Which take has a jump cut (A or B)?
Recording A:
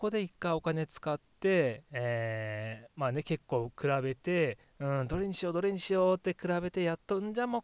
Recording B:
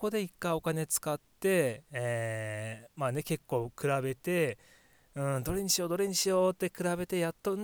A